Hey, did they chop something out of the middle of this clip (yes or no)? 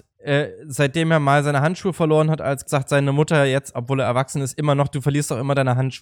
yes